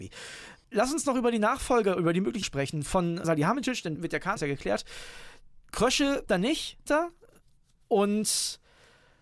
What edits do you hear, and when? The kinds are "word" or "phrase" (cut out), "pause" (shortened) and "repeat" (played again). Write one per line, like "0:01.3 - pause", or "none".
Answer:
0:02.4 - word
0:03.2 - word
0:04.0 - word
0:04.4 - word
0:06.3 - word
0:06.9 - word